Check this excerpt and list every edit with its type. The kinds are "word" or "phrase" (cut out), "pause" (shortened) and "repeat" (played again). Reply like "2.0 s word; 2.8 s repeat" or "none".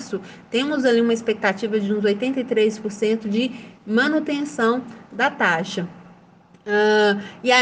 none